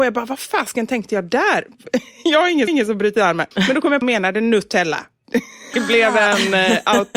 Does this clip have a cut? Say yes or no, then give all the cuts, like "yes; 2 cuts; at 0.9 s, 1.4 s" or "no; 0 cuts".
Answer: yes; 4 cuts; at 2.7 s, 3.5 s, 4.0 s, 5.7 s